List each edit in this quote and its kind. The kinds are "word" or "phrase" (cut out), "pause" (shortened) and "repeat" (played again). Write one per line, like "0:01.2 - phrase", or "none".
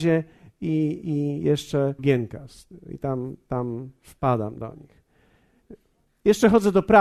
0:02.0 - phrase